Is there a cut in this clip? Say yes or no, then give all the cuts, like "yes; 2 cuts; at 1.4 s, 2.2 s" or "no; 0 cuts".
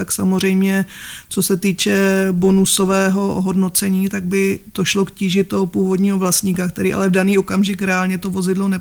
no; 0 cuts